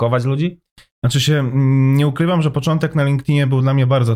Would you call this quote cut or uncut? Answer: uncut